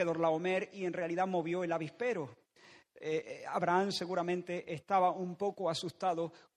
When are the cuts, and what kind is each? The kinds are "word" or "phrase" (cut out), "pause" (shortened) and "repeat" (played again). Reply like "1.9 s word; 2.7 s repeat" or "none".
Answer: none